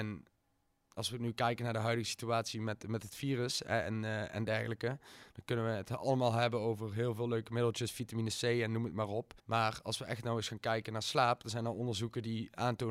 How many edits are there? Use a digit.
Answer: 1